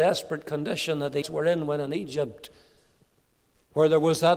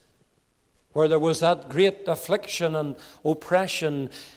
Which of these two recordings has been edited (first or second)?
first